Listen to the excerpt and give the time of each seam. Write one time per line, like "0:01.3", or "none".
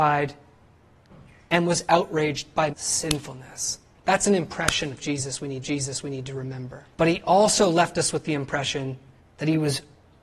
0:02.7
0:04.0
0:05.6
0:06.9
0:09.2